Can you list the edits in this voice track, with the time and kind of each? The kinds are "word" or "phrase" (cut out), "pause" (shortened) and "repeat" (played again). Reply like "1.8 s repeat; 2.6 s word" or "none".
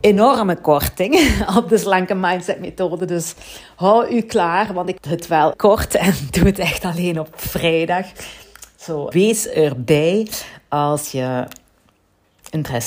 5.0 s word; 5.5 s word; 9.1 s word